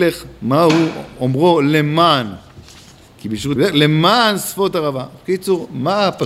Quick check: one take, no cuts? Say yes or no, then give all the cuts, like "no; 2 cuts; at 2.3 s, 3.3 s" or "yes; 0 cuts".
no; 1 cut; at 3.6 s